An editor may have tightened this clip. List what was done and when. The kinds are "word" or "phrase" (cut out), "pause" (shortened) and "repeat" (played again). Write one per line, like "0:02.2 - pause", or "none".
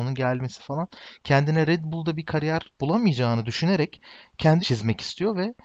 0:04.6 - word